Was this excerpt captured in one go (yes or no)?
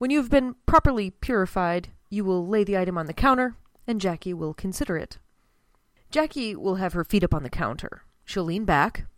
yes